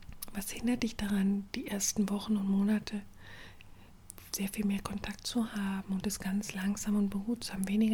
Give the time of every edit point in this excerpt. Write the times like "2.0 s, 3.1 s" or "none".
none